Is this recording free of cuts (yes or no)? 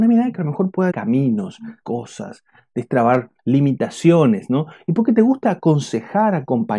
no